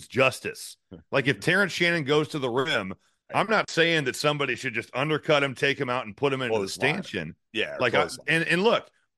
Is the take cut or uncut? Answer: uncut